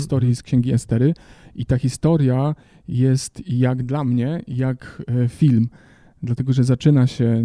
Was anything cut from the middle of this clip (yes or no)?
no